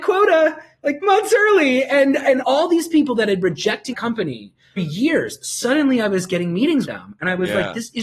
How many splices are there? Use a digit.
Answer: 6